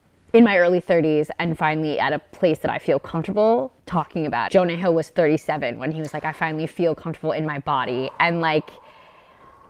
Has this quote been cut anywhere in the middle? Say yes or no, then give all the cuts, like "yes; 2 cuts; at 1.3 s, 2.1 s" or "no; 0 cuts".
yes; 1 cut; at 4.5 s